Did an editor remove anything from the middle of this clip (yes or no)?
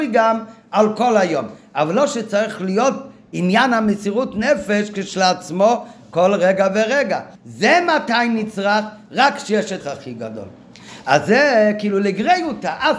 yes